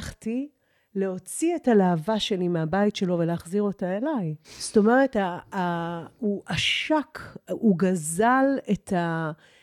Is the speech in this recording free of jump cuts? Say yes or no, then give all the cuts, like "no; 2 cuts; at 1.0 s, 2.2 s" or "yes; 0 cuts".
no; 1 cut; at 4.4 s